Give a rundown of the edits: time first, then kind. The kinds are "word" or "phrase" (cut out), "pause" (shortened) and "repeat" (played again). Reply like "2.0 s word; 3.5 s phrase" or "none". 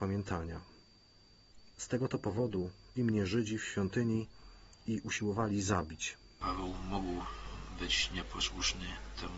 1.7 s pause; 3.0 s word